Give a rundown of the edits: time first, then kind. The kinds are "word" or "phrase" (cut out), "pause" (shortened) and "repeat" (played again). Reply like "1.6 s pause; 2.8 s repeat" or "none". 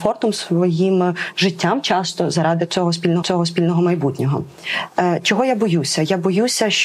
3.2 s repeat